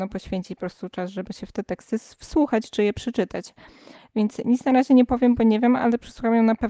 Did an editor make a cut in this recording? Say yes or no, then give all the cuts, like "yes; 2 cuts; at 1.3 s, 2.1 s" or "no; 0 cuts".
no; 0 cuts